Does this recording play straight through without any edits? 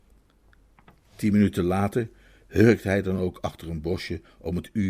yes; 0 cuts

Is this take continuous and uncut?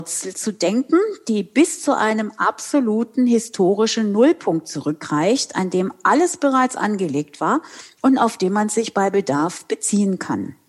yes; 0 cuts

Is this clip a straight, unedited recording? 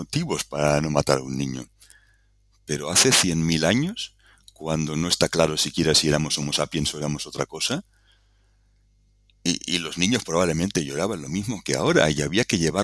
yes; 0 cuts

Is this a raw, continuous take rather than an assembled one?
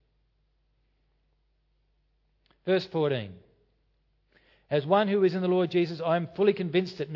yes; 0 cuts

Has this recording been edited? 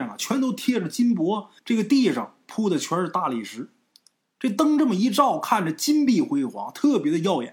yes; 1 cut; at 1.6 s

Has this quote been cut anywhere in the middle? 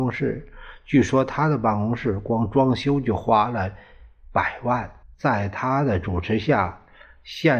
yes; 1 cut; at 5.0 s

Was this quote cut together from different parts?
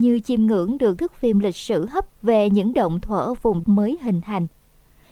yes; 4 cuts; at 1.0 s, 2.1 s, 2.7 s, 3.6 s

